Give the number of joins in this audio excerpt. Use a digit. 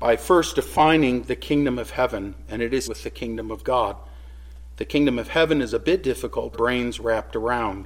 2